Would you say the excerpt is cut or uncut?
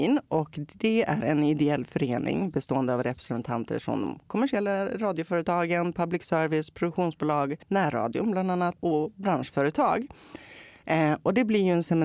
cut